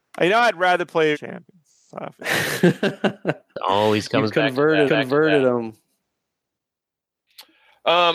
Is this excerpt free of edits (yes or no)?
no